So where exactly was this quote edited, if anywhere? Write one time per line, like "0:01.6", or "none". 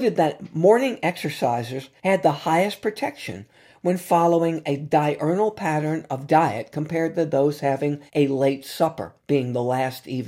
0:02.0
0:08.1
0:09.2